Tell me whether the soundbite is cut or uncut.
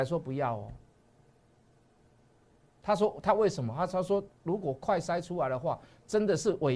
uncut